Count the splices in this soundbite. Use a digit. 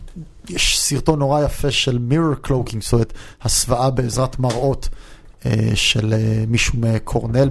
0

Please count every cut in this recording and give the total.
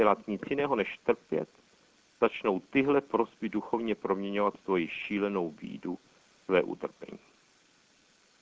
0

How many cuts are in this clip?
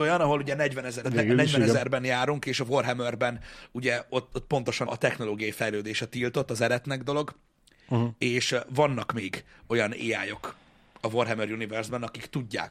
3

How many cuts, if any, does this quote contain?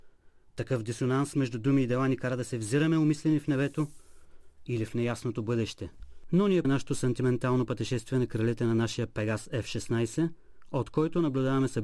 1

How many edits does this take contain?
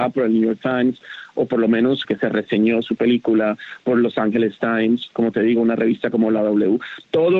1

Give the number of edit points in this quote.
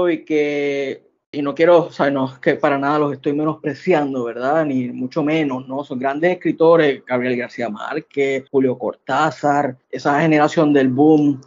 3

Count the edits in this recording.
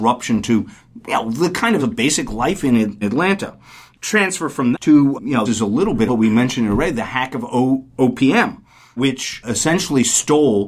8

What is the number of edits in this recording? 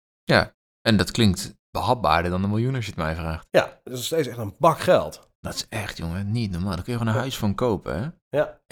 1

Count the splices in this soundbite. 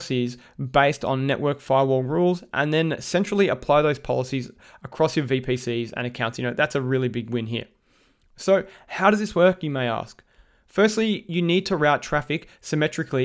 0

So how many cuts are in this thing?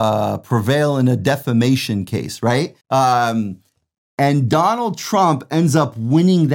1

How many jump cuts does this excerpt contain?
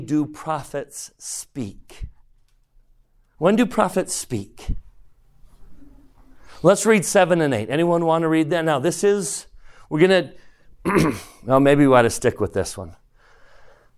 0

